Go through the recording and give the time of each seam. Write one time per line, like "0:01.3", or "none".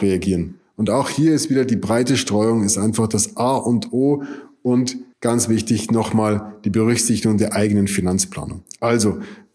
0:05.1

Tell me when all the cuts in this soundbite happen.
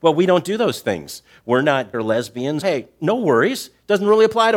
0:01.9
0:02.6

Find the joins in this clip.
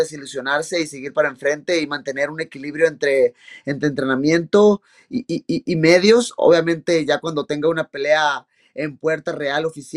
none

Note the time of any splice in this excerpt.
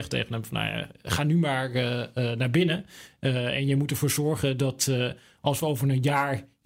none

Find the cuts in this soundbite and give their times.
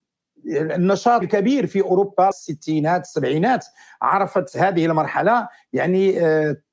0:01.2
0:02.3

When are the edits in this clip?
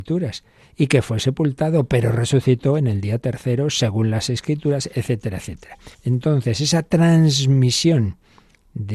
0:05.9

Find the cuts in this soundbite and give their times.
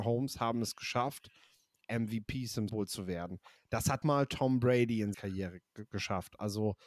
0:01.8
0:02.7
0:04.0
0:05.1

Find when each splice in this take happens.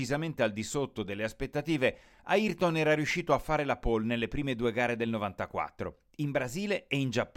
none

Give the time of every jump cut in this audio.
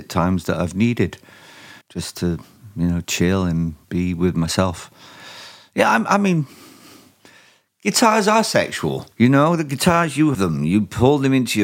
0:01.8
0:03.8
0:09.1
0:10.3

